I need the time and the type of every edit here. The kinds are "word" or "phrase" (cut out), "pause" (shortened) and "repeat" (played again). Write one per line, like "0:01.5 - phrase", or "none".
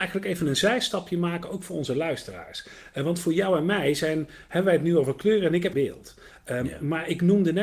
0:05.7 - phrase